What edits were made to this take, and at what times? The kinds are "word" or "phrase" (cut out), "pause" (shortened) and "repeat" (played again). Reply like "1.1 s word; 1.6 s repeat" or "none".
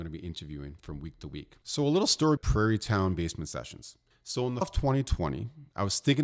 1.6 s pause; 2.4 s phrase; 4.1 s pause; 4.6 s word